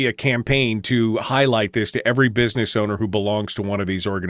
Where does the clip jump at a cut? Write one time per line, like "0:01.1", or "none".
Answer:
none